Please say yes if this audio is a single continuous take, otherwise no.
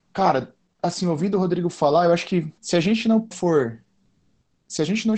no